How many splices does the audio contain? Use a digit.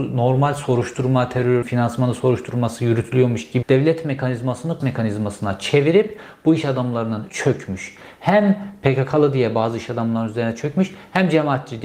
4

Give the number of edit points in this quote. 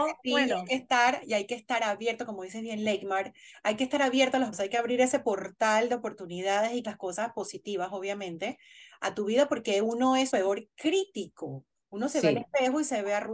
3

